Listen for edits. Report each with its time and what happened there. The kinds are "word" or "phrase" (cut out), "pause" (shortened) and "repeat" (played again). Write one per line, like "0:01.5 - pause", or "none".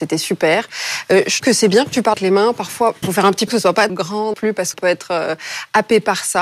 0:01.4 - word
0:02.1 - word
0:03.0 - word
0:03.5 - word
0:03.9 - word
0:04.3 - word
0:04.7 - word